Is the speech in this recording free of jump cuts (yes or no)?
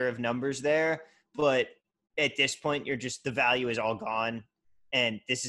yes